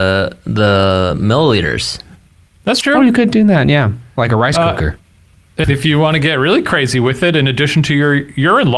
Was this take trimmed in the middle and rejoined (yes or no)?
yes